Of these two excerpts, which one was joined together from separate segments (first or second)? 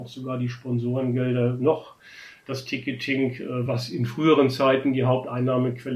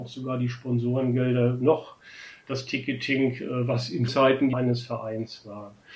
second